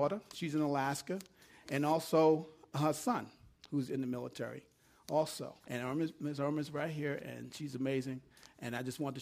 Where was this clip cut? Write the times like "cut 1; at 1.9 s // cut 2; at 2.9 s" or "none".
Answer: cut 1; at 5.6 s